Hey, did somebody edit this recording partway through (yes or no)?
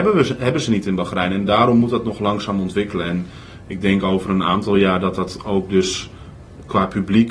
no